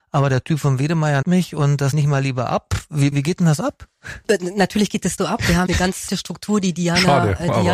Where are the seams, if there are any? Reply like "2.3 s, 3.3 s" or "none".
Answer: 1.2 s, 1.9 s, 3.1 s, 5.2 s, 5.7 s, 6.1 s

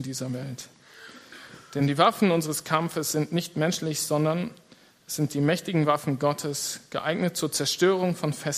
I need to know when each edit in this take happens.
none

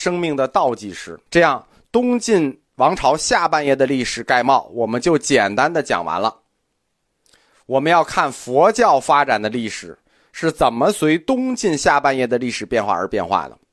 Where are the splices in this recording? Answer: 1.3 s, 2.7 s

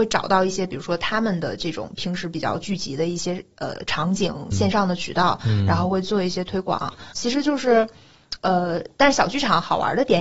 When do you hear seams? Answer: 4.5 s, 7.1 s

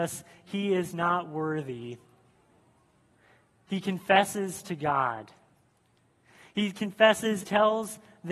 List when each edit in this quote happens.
7.4 s

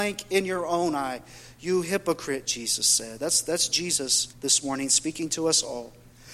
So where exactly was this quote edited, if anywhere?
4.3 s

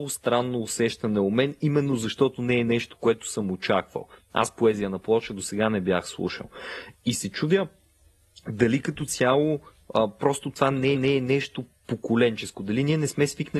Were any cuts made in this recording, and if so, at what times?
10.9 s

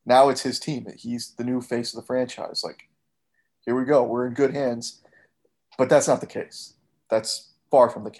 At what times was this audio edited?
none

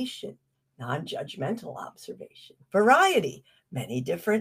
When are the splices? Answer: 2.6 s

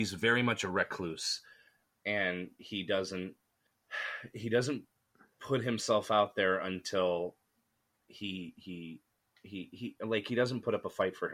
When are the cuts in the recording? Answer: none

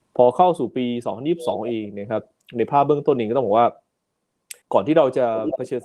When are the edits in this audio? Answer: 4.6 s

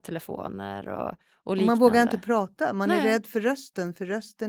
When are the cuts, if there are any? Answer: none

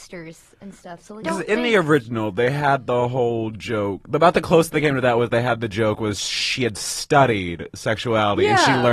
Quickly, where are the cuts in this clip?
1.2 s

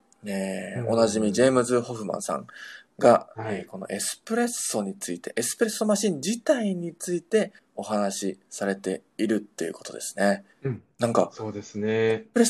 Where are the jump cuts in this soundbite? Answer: 7.6 s, 10.5 s, 10.9 s

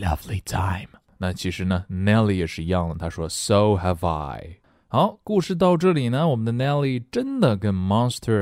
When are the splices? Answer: none

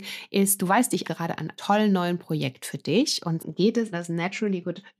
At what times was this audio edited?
1.0 s, 1.6 s, 3.4 s, 3.9 s

